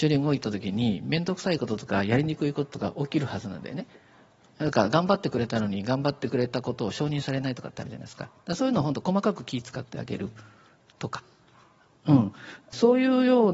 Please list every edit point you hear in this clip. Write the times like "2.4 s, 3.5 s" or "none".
none